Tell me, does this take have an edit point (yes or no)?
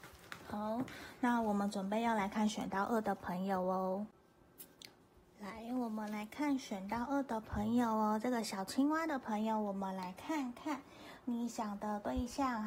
no